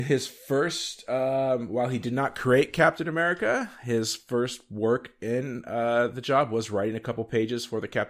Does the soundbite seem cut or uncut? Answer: uncut